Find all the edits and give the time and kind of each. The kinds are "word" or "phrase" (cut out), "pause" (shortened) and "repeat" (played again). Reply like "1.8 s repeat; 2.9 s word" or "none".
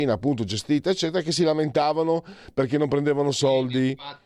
none